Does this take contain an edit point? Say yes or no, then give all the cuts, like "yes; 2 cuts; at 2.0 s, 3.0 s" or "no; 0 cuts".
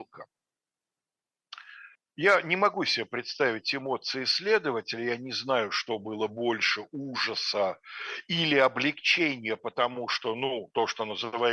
yes; 1 cut; at 1.9 s